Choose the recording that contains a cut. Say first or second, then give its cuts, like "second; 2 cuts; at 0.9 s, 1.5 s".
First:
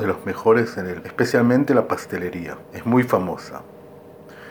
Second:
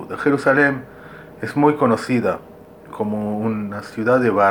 first; 1 cut; at 1.0 s